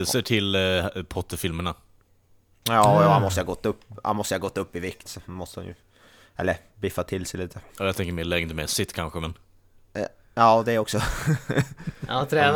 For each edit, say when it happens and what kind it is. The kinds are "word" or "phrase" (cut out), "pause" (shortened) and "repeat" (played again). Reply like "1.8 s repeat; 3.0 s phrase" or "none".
none